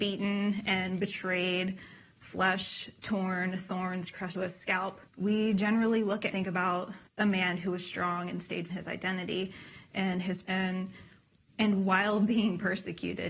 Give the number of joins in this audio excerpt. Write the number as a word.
six